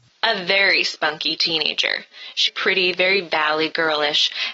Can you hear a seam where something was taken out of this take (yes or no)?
yes